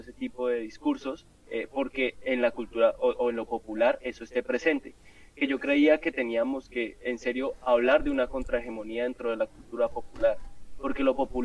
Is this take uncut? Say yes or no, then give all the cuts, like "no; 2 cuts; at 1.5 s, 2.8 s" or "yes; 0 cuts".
yes; 0 cuts